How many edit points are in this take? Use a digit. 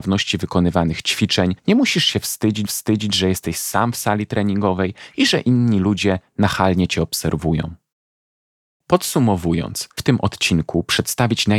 3